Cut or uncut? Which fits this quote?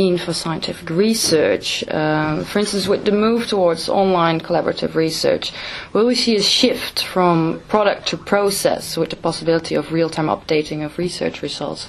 uncut